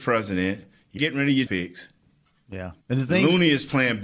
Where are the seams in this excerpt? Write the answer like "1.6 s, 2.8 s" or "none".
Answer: 1.0 s, 1.5 s, 2.8 s